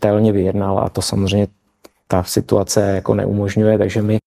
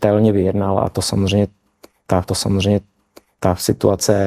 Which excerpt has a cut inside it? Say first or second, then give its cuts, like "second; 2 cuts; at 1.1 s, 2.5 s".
second; 1 cut; at 2.2 s